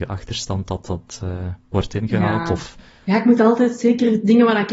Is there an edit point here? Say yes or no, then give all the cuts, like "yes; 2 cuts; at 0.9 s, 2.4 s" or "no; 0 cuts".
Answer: no; 0 cuts